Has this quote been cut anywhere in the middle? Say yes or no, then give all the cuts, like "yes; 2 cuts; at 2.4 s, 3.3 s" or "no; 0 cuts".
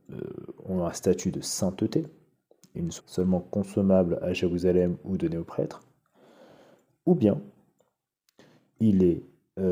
yes; 1 cut; at 3.0 s